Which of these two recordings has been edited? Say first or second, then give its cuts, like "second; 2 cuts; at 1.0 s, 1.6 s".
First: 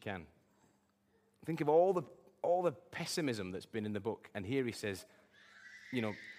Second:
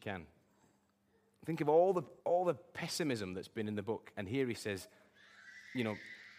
second; 1 cut; at 2.2 s